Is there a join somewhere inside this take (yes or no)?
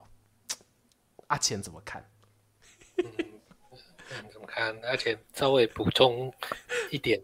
no